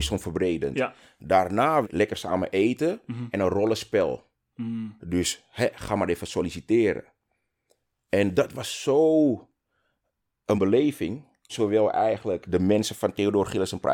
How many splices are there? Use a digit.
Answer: 4